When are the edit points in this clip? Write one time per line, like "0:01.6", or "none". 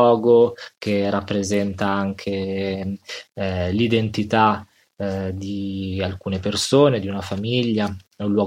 none

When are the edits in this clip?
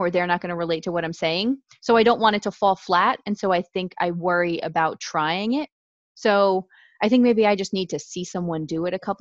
none

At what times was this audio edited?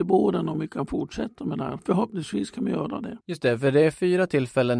0:03.2

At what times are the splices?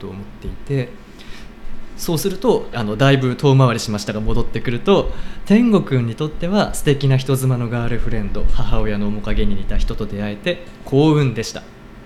0:02.7

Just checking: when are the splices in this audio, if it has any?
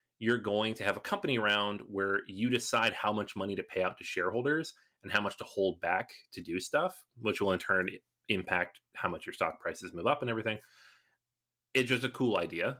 none

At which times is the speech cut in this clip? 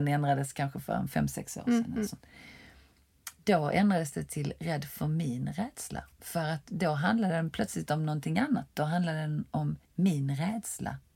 0:09.8

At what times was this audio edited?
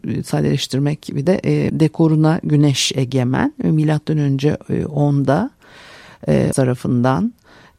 0:01.3
0:01.7
0:06.5

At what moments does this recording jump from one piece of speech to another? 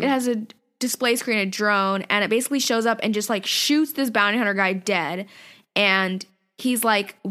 none

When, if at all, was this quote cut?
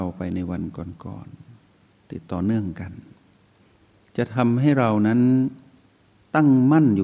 none

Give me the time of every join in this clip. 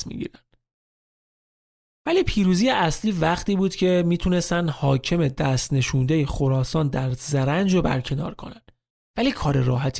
none

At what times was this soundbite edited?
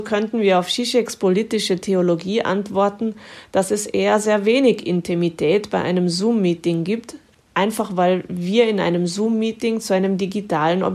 none

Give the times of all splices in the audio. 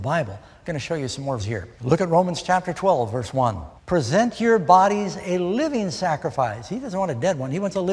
0:01.4
0:01.7
0:03.8

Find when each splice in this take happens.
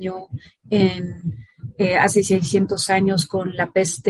none

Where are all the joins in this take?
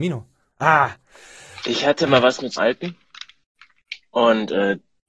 0:02.6

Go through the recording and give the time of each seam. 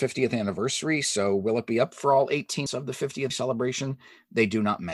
0:02.7
0:03.3

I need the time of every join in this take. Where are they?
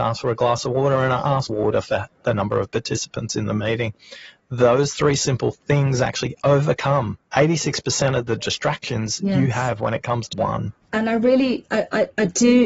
0:01.5
0:07.3
0:10.3
0:10.8

